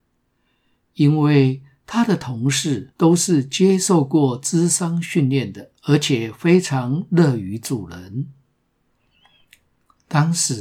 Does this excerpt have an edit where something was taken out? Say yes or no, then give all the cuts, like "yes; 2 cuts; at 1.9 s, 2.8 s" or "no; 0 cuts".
yes; 2 cuts; at 2.9 s, 5.8 s